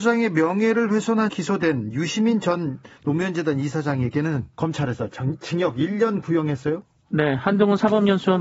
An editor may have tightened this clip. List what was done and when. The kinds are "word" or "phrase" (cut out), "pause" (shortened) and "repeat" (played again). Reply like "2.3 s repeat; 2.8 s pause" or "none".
1.3 s word; 4.5 s pause